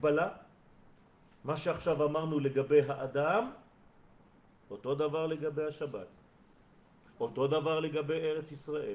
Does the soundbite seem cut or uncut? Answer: uncut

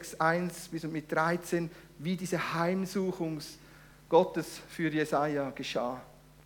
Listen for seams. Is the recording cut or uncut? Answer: uncut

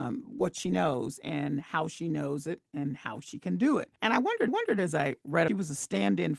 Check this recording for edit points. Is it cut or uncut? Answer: cut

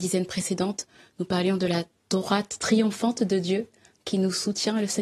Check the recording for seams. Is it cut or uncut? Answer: uncut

